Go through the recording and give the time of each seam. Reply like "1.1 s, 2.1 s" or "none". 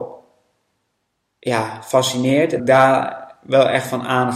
2.6 s